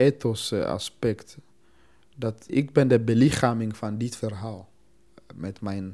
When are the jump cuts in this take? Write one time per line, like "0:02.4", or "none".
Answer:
0:02.5